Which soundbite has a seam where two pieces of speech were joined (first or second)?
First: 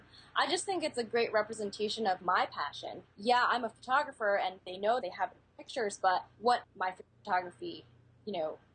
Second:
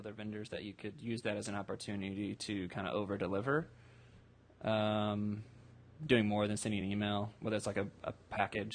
first